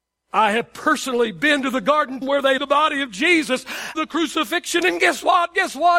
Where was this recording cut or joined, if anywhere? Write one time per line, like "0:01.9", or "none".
0:02.2
0:02.6
0:03.9

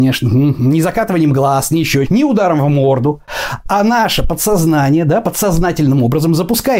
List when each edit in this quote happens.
0:02.1

